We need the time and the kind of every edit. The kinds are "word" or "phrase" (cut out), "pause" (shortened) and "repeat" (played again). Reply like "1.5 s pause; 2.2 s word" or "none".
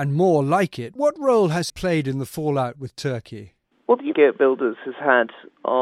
1.7 s phrase; 3.7 s pause; 4.1 s phrase